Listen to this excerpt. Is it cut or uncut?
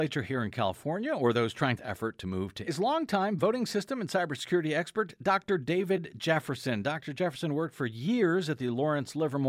cut